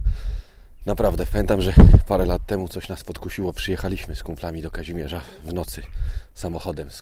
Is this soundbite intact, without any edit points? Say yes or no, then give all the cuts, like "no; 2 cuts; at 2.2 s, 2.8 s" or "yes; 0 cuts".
yes; 0 cuts